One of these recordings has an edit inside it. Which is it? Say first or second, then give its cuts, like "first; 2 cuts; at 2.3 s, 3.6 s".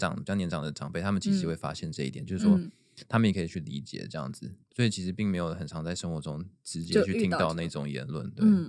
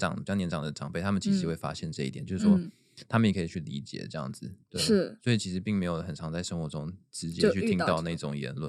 first; 1 cut; at 4.7 s